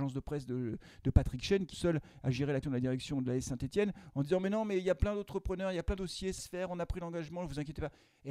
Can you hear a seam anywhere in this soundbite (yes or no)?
yes